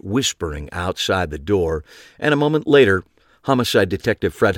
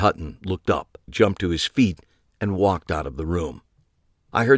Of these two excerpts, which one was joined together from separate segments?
second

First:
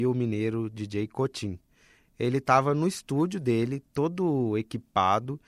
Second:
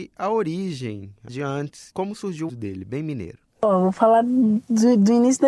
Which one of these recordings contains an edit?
second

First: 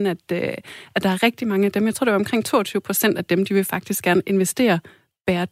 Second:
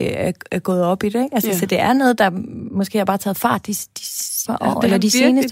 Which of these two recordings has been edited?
second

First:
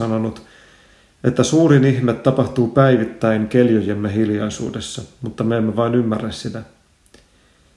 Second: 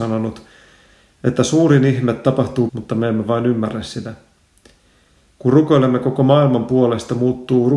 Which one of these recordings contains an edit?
second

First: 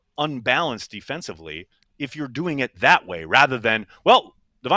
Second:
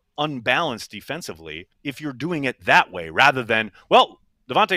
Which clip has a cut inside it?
second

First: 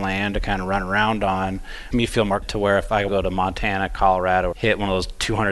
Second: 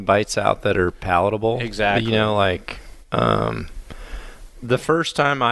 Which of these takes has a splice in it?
first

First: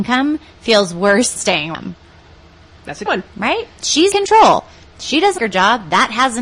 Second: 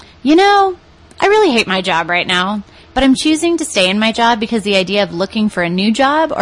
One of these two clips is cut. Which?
first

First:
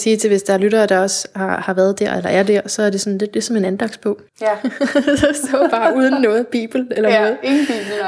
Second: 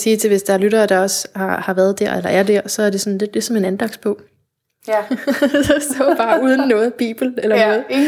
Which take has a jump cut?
first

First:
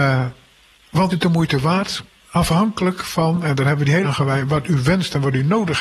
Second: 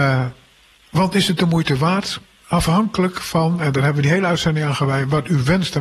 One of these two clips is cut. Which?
first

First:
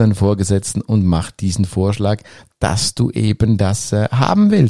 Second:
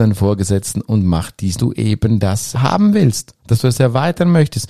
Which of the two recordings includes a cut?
second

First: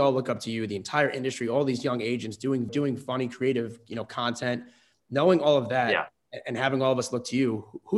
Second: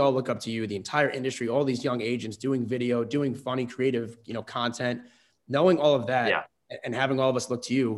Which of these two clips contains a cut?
first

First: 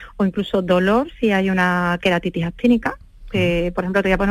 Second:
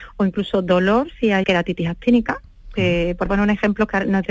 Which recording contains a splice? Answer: second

